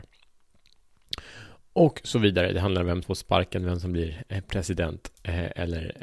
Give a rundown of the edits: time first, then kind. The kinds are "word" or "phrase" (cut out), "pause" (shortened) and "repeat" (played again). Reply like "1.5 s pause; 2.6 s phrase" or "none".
3.0 s word